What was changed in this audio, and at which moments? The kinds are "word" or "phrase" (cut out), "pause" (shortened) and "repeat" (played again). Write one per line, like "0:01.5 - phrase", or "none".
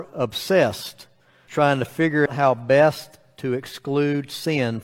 0:01.5 - word
0:02.3 - word